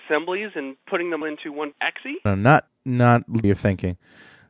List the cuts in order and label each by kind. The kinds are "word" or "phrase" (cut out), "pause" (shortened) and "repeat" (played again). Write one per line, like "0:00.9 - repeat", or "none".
0:01.2 - word
0:01.7 - word
0:02.3 - word
0:02.7 - word
0:03.4 - word